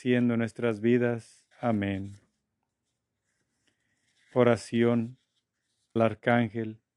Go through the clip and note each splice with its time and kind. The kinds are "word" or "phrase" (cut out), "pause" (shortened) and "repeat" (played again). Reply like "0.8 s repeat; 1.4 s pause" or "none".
1.5 s pause; 6.0 s word